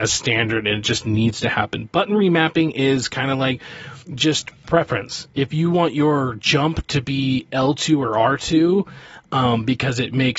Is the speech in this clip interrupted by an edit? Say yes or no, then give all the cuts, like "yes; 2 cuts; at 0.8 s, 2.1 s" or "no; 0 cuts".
yes; 1 cut; at 4.0 s